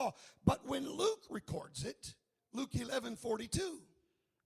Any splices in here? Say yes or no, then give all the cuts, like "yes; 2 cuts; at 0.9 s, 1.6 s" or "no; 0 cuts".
no; 0 cuts